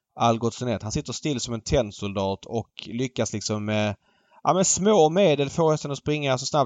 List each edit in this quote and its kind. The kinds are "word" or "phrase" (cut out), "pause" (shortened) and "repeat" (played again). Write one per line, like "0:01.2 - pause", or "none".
none